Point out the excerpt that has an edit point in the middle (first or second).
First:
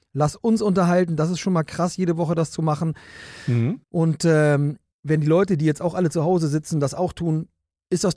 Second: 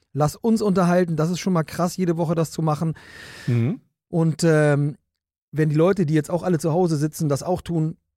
first